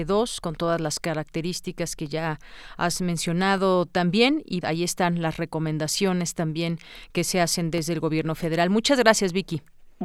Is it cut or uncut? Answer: cut